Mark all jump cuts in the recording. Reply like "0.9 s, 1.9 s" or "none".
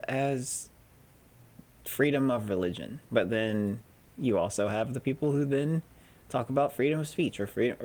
3.0 s